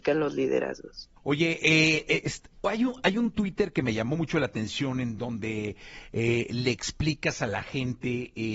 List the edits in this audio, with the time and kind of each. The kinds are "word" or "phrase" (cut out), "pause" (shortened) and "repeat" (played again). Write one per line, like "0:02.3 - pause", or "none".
0:01.2 - pause